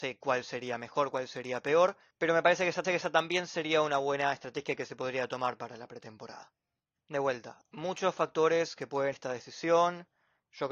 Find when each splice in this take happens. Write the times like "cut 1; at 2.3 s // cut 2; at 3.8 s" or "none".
cut 1; at 2.1 s // cut 2; at 2.8 s // cut 3; at 7.6 s // cut 4; at 9.1 s

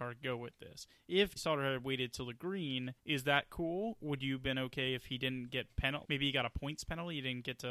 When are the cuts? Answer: cut 1; at 1.4 s // cut 2; at 3.0 s // cut 3; at 6.0 s

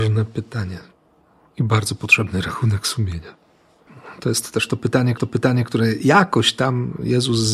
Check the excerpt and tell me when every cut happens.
cut 1; at 5.2 s

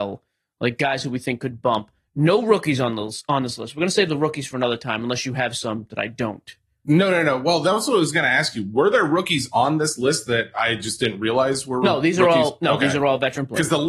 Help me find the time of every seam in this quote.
none

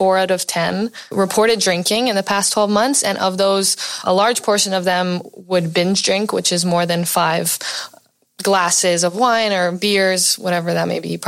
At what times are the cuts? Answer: cut 1; at 1.1 s // cut 2; at 4.0 s // cut 3; at 8.3 s

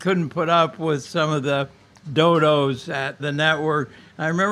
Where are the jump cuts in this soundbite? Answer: cut 1; at 3.2 s

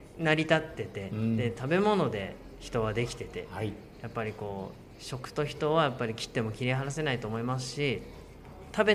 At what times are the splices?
none

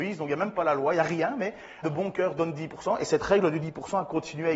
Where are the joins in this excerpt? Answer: cut 1; at 1.8 s

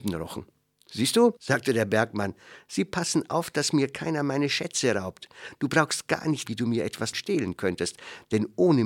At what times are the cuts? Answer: cut 1; at 1.4 s // cut 2; at 6.5 s // cut 3; at 7.1 s

